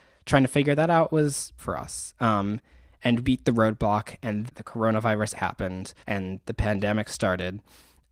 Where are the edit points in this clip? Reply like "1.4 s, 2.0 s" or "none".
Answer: 1.6 s, 3.2 s, 4.5 s, 5.3 s, 6.0 s

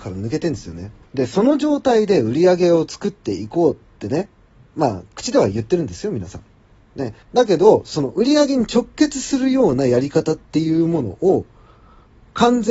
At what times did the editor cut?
1.0 s, 7.2 s

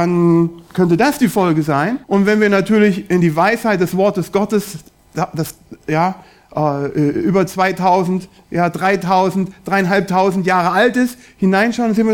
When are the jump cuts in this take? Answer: 2.0 s

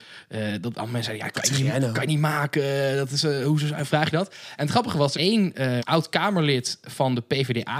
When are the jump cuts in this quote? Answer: 5.1 s, 5.8 s

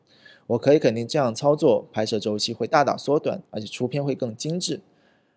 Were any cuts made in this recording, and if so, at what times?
3.5 s

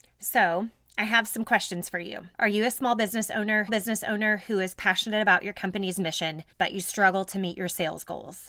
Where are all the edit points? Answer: 2.3 s, 3.7 s, 6.5 s

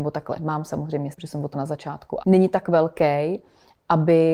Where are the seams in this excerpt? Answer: 1.1 s, 1.5 s, 2.2 s

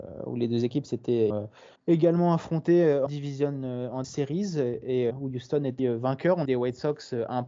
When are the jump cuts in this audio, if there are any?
1.3 s, 1.8 s, 3.1 s, 4.0 s, 5.1 s, 5.8 s, 6.4 s

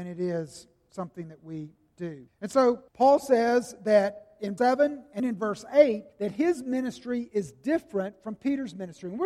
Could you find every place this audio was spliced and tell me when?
2.3 s, 2.9 s, 4.6 s, 5.2 s, 6.1 s

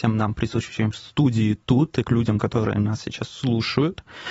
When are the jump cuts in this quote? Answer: 2.0 s

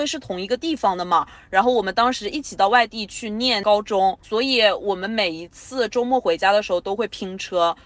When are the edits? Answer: none

